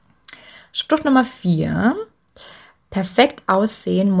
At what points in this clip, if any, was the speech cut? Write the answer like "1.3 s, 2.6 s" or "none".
none

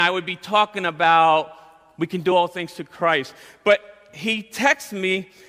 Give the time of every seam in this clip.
none

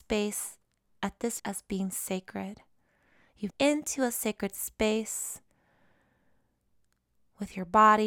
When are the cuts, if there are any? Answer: 1.4 s, 3.5 s

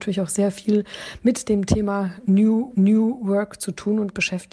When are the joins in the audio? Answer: 2.7 s

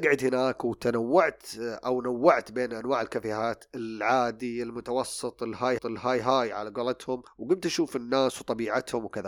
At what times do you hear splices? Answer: 5.8 s

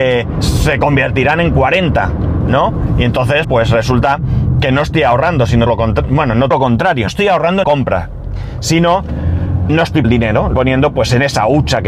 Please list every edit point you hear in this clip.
3.4 s, 5.7 s, 6.5 s, 7.1 s, 7.6 s, 9.7 s, 10.0 s, 10.5 s

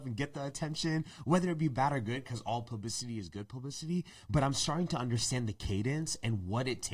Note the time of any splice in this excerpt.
none

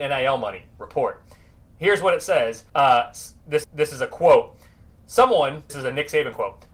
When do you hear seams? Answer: 2.7 s, 3.6 s, 5.7 s

